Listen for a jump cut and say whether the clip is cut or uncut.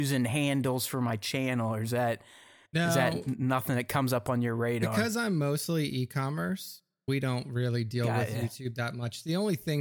uncut